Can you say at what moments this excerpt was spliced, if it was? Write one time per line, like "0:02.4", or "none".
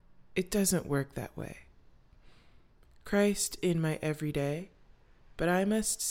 0:03.6